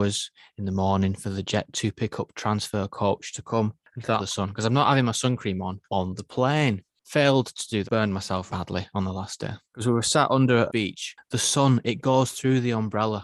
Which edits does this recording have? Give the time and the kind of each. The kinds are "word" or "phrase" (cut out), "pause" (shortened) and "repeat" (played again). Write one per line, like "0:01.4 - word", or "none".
0:04.2 - phrase
0:05.8 - pause
0:07.8 - word
0:08.5 - word
0:09.6 - pause
0:10.7 - phrase